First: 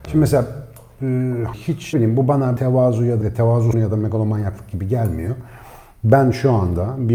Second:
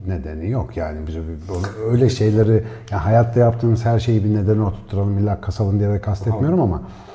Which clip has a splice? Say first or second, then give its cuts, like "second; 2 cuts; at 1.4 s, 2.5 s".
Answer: first; 5 cuts; at 1.5 s, 1.9 s, 2.6 s, 3.2 s, 3.7 s